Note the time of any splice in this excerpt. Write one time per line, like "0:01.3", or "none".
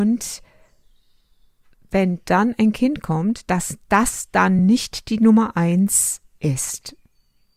none